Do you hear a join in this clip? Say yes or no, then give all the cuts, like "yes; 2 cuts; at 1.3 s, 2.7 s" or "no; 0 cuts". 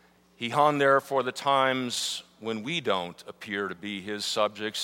no; 0 cuts